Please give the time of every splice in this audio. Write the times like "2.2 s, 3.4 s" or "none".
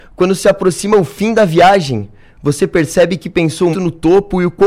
3.7 s